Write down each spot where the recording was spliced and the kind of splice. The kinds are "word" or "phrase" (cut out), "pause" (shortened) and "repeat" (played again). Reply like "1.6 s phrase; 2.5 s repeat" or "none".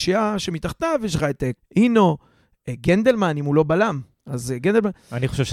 1.6 s word